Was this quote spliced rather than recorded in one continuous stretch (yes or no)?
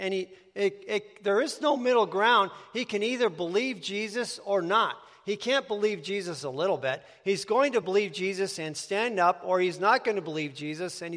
no